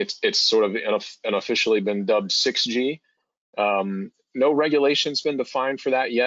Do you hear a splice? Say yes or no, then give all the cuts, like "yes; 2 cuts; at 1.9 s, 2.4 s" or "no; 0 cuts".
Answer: no; 0 cuts